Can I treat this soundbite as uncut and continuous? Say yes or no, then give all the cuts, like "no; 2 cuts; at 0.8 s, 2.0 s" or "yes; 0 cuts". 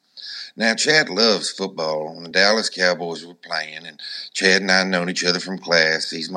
yes; 0 cuts